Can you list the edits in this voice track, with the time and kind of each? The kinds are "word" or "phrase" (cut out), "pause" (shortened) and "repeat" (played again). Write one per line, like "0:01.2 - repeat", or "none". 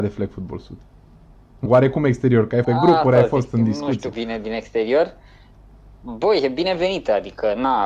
0:01.7 - word
0:02.6 - word
0:04.1 - word